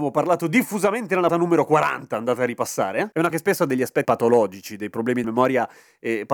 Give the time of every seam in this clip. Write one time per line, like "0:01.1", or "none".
0:01.3
0:03.3
0:04.0
0:05.2

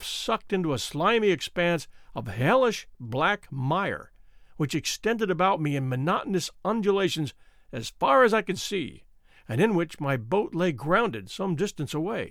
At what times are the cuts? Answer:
none

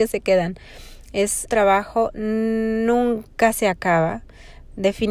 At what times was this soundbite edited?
0:01.5

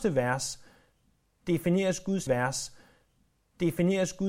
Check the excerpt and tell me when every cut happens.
0:02.3

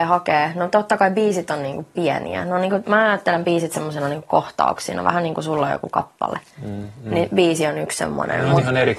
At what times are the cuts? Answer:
none

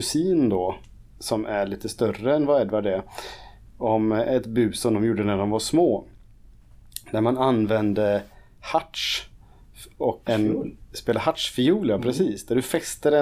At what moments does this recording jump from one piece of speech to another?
0:10.3

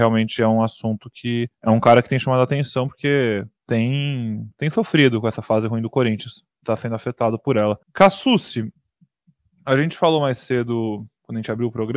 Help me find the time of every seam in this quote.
0:01.5
0:03.6
0:07.8

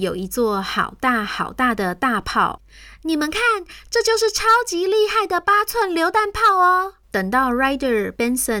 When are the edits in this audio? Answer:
0:07.0

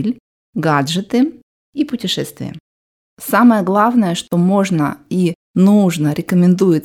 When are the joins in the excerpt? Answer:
none

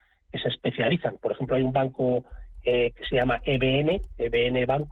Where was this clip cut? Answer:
none

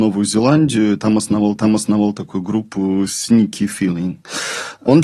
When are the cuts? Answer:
0:01.6

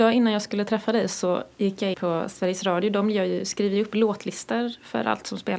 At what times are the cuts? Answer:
0:01.9

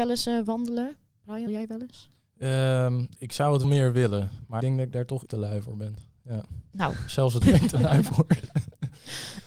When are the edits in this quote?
0:01.5
0:03.2
0:03.6
0:04.6
0:05.3
0:07.4

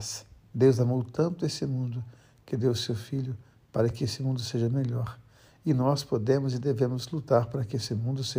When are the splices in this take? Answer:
none

